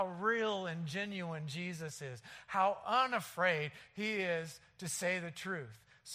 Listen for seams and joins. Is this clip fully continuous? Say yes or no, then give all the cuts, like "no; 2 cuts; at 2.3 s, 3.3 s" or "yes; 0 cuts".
yes; 0 cuts